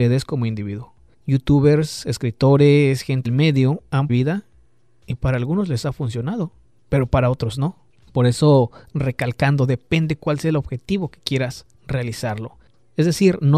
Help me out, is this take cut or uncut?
cut